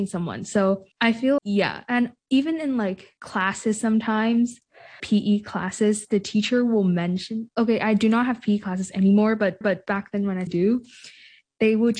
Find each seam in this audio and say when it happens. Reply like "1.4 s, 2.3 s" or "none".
0.9 s, 1.4 s, 3.2 s, 5.0 s, 9.6 s, 10.5 s